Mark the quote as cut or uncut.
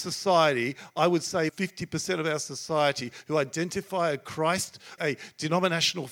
cut